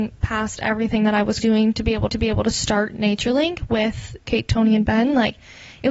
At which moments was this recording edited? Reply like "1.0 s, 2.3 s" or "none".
1.4 s, 2.1 s, 4.2 s